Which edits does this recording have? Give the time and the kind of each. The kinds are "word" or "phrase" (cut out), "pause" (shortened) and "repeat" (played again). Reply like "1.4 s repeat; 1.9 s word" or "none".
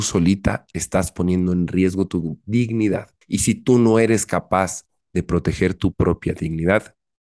3.2 s pause